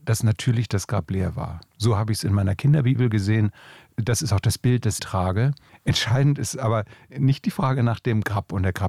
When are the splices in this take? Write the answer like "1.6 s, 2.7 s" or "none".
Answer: 5.0 s